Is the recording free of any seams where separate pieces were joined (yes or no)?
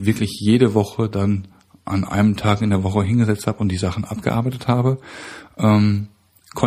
yes